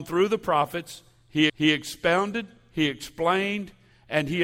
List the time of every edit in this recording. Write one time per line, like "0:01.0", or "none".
0:01.5